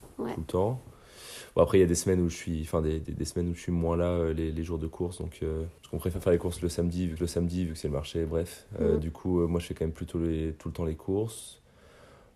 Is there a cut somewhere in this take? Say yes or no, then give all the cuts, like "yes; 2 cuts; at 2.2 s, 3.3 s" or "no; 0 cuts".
yes; 2 cuts; at 5.8 s, 7.2 s